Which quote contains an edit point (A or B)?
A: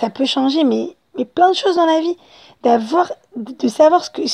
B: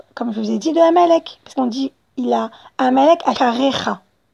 B